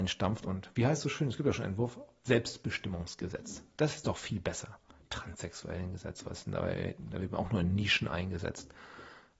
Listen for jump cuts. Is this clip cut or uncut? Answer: uncut